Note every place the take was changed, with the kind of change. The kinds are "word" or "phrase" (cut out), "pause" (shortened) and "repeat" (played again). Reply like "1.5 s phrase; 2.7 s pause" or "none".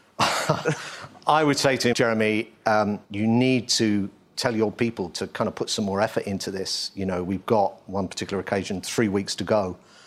1.9 s word; 3.0 s pause